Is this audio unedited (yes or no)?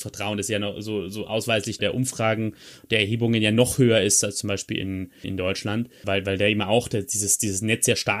no